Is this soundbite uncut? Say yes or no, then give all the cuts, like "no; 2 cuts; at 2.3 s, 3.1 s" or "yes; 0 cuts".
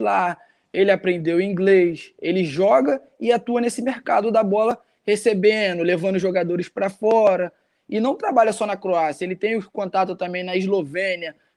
yes; 0 cuts